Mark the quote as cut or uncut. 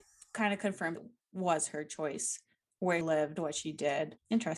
cut